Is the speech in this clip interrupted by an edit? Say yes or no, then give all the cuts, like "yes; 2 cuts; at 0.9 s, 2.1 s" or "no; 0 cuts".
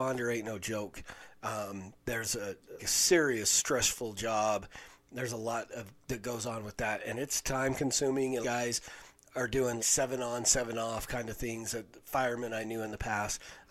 yes; 3 cuts; at 2.8 s, 8.4 s, 9.8 s